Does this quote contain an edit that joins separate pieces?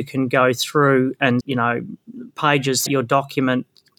yes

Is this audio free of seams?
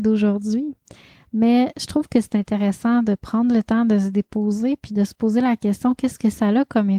yes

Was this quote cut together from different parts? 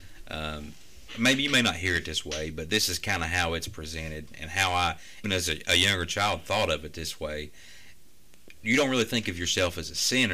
yes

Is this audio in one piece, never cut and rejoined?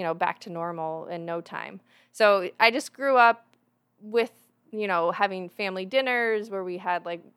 yes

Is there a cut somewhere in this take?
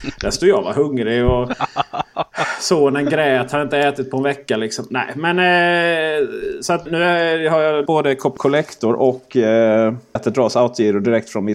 yes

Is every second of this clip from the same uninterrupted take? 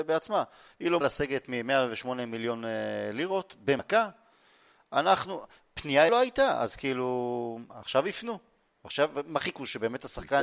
no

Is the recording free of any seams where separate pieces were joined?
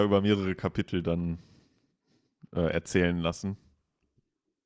yes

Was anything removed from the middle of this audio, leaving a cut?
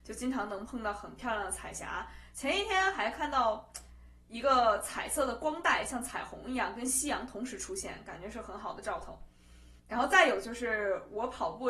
yes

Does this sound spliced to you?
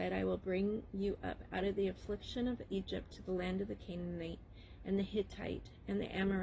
no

